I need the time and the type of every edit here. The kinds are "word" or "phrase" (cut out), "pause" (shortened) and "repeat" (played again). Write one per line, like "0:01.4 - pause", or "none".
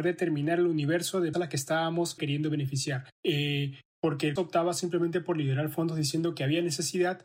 0:01.3 - word
0:02.2 - word
0:03.1 - pause
0:04.4 - word